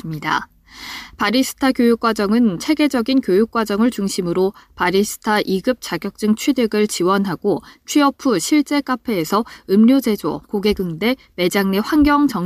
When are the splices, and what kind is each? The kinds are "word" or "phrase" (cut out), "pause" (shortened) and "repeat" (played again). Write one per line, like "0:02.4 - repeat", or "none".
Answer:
none